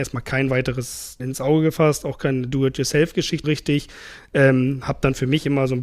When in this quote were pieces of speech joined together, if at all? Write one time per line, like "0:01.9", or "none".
0:01.2
0:03.4